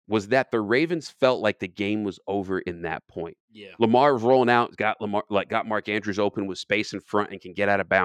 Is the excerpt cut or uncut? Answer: uncut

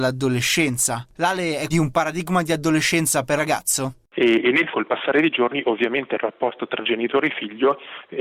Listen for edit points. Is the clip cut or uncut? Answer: cut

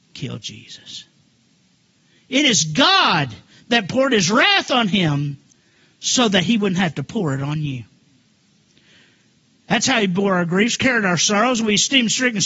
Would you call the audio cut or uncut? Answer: uncut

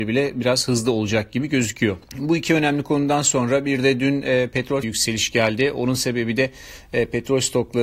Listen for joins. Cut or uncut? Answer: cut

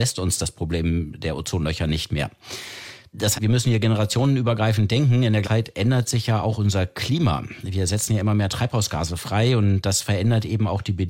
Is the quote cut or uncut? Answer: cut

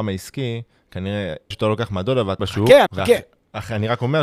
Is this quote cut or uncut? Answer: cut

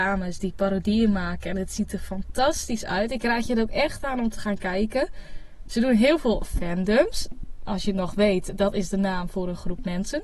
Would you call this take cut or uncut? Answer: uncut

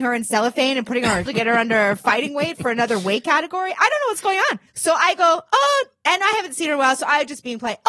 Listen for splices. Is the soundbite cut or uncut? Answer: cut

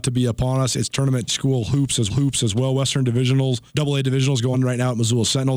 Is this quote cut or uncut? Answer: cut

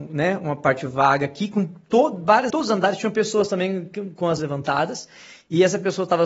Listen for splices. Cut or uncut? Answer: cut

